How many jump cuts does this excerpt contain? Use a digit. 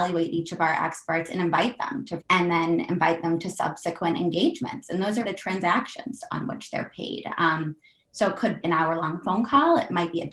3